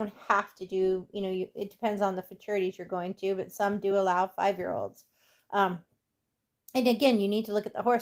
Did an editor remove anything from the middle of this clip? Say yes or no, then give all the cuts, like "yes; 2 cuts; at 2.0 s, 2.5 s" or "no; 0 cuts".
no; 0 cuts